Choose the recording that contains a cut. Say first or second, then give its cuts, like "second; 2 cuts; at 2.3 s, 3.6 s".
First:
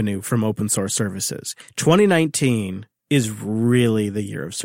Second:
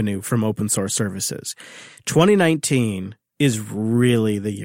first; 1 cut; at 1.6 s